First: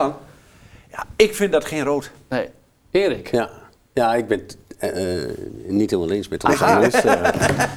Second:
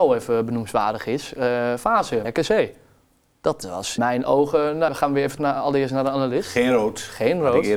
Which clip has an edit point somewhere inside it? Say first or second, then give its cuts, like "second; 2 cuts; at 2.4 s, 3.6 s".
second; 4 cuts; at 2.2 s, 4.0 s, 4.9 s, 5.4 s